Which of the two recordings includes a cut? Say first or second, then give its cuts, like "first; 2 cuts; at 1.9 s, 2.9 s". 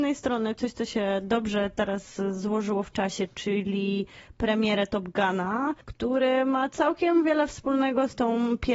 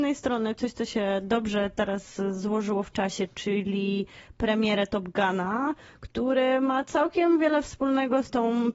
first; 1 cut; at 5.8 s